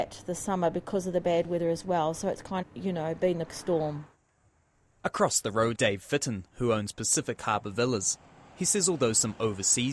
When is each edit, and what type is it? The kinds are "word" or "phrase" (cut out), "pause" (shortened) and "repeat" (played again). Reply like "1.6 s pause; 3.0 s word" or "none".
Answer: 2.6 s word; 3.5 s word; 5.7 s word